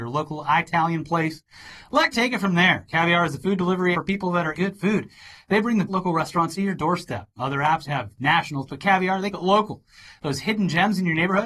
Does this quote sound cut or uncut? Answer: cut